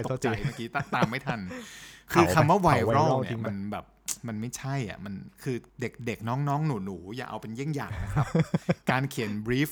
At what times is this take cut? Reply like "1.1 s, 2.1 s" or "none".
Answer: 5.7 s